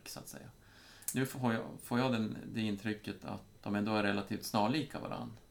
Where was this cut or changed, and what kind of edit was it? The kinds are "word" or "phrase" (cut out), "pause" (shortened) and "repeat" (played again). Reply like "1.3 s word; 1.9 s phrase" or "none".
3.6 s word